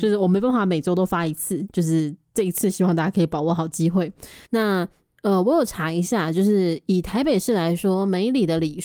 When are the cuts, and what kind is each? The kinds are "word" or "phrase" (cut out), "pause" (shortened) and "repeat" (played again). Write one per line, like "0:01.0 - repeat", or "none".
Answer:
0:04.4 - pause